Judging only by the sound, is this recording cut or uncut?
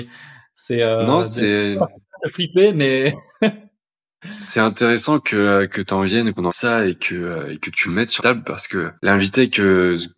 cut